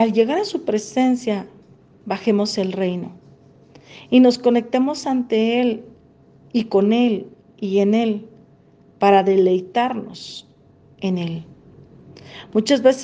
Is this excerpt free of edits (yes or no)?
yes